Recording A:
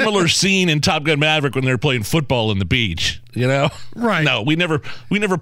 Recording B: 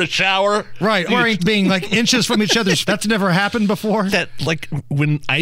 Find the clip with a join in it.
B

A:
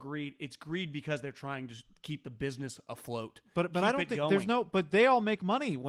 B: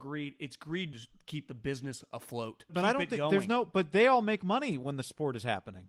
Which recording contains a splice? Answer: B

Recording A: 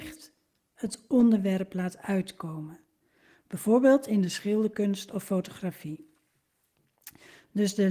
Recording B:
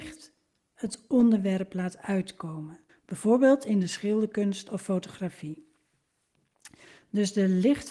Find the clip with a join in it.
B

